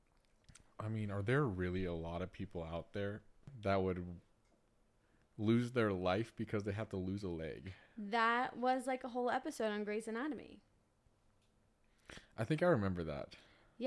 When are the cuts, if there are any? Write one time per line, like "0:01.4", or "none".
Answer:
none